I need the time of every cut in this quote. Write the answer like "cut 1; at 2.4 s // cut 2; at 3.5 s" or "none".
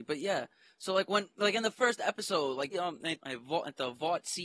cut 1; at 2.7 s // cut 2; at 3.2 s